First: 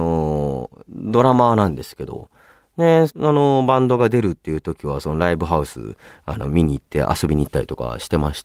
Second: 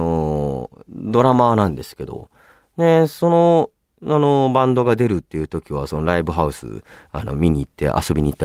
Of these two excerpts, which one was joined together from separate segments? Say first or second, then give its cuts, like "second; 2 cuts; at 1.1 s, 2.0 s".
first; 1 cut; at 3.1 s